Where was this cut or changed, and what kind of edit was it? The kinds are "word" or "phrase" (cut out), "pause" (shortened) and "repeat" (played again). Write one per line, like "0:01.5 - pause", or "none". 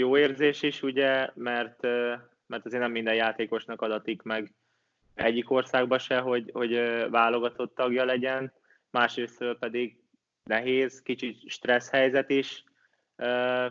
none